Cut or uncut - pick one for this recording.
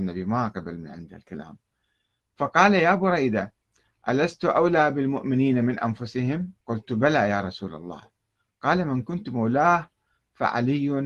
cut